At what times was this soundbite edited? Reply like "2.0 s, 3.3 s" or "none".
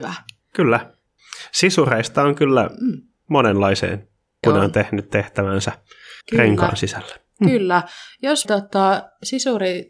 4.4 s, 6.2 s, 7.3 s, 8.4 s